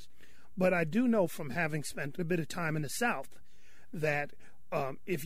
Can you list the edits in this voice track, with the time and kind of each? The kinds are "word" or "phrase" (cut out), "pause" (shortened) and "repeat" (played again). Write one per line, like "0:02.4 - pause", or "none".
0:02.2 - word